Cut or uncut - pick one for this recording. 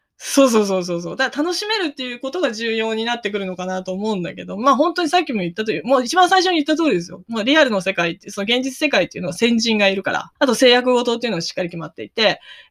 cut